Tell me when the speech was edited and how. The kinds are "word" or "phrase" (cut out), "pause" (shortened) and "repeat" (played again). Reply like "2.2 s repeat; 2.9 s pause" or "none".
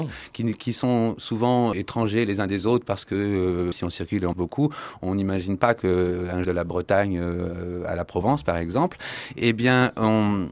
1.7 s word; 3.7 s phrase; 4.3 s word; 6.4 s phrase